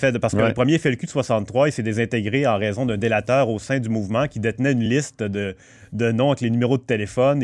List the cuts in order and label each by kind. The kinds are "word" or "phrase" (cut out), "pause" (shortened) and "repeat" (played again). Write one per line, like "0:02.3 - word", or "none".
none